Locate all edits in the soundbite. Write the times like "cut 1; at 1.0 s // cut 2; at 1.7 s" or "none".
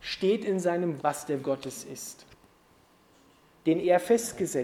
cut 1; at 1.0 s // cut 2; at 1.4 s